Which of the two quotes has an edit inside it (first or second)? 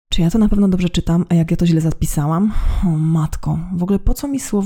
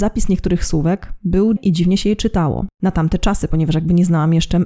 second